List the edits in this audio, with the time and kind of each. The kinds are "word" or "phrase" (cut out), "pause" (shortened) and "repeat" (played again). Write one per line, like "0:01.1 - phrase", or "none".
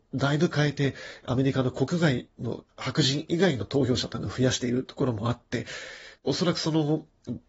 0:02.7 - phrase
0:06.2 - pause